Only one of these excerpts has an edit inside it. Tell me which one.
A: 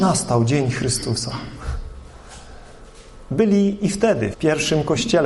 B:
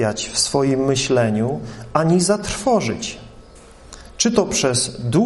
A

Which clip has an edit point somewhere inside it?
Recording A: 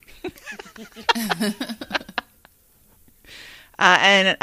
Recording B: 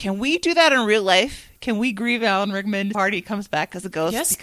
B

